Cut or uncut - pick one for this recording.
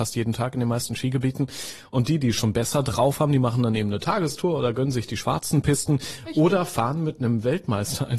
uncut